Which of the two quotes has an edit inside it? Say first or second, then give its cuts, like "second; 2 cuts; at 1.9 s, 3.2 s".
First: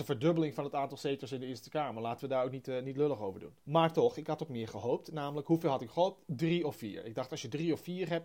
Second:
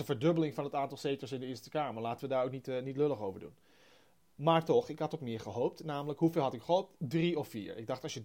first; 1 cut; at 3.6 s